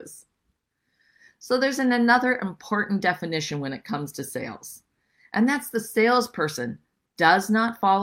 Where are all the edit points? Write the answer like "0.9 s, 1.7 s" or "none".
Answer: none